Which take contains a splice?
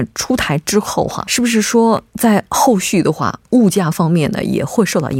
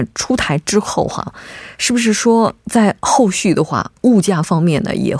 first; 1 cut; at 1.2 s

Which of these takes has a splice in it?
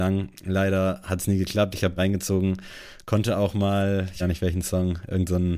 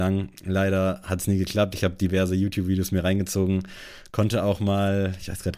first; 2 cuts; at 2.0 s, 4.2 s

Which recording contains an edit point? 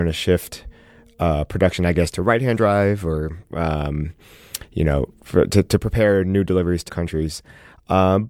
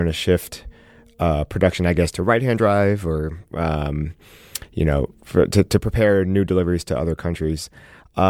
first; 1 cut; at 6.9 s

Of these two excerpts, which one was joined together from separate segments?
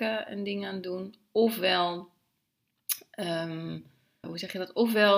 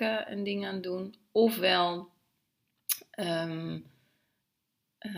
first; 1 cut; at 4.2 s

